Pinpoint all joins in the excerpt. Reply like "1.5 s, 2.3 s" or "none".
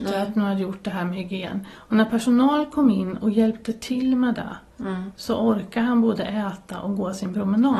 1.7 s